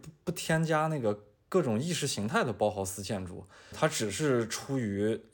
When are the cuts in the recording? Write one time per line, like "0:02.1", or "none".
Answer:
0:03.7